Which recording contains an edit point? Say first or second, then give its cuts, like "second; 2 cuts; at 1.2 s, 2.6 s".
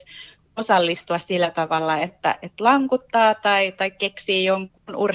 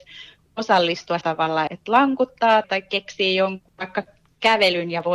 second; 4 cuts; at 1.2 s, 1.7 s, 2.6 s, 3.8 s